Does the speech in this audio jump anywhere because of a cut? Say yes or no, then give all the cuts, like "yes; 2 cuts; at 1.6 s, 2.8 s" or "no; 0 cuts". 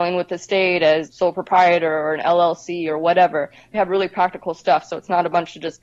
yes; 2 cuts; at 1.1 s, 3.7 s